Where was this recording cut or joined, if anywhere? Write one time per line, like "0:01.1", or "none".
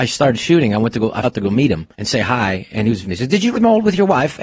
0:01.2
0:01.9
0:03.0
0:03.5

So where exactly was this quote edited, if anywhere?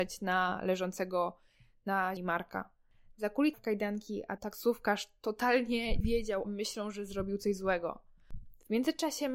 0:02.2
0:03.5
0:04.4
0:06.0
0:06.4

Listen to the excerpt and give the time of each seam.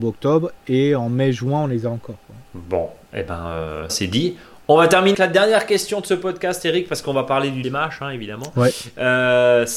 0:02.4
0:03.9
0:05.1
0:07.6

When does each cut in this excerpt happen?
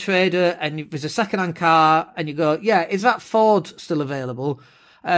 none

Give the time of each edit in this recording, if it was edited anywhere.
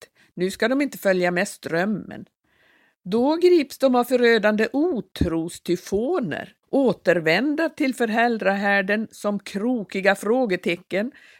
0:06.6

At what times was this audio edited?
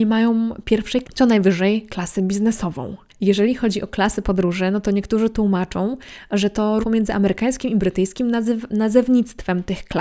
0:01.0
0:03.1
0:06.8

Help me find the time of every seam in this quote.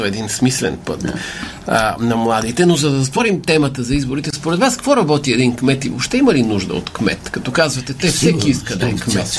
none

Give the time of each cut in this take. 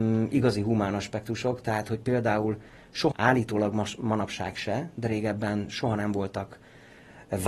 0:03.1

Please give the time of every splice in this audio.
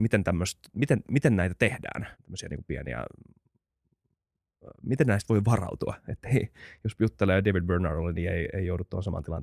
0:02.1
0:04.7

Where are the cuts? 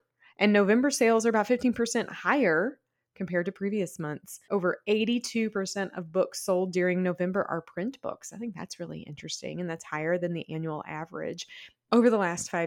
0:04.4

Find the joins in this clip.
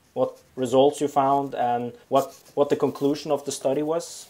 0:02.0

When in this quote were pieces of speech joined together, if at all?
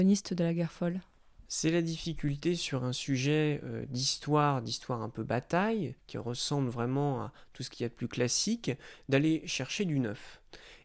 0:01.5
0:06.0

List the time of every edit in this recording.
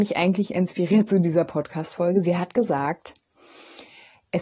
none

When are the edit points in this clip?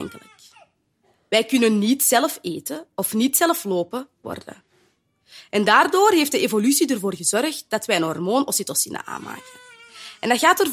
0:04.2

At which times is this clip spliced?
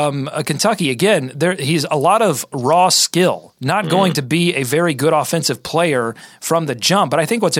none

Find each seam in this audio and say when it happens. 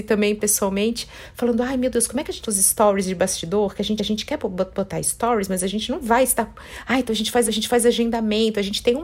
0:02.4
0:04.0
0:07.5

